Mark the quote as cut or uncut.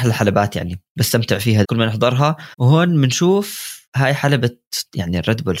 cut